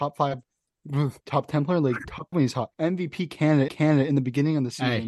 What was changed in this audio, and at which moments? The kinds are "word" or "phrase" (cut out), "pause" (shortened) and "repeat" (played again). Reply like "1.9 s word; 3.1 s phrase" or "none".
1.2 s pause; 2.3 s word; 2.7 s pause; 3.7 s repeat